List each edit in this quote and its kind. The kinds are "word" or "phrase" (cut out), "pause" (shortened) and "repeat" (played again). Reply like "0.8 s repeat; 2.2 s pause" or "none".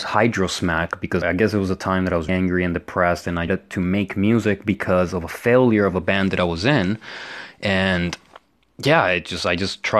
1.2 s word; 2.3 s word; 3.5 s phrase